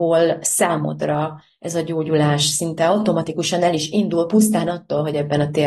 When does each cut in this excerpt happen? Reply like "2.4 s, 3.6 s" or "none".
none